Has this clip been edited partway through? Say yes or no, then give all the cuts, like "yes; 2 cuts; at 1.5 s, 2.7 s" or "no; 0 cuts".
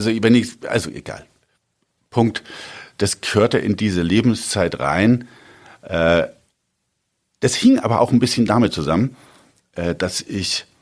no; 0 cuts